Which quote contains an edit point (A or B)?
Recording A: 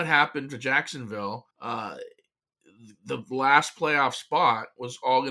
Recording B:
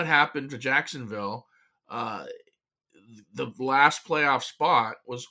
A